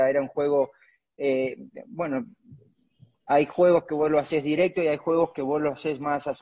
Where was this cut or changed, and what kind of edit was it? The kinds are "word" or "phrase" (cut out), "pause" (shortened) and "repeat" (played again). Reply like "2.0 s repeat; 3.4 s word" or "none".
none